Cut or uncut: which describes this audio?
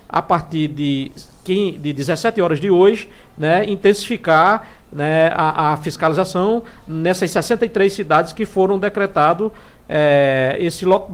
uncut